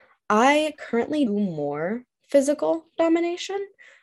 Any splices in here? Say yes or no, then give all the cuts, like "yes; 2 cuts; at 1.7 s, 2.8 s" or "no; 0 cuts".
yes; 1 cut; at 1.3 s